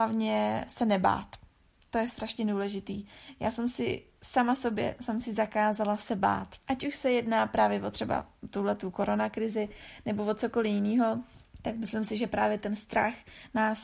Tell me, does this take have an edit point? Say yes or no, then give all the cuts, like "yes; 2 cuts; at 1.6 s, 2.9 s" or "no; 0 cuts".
yes; 1 cut; at 6.6 s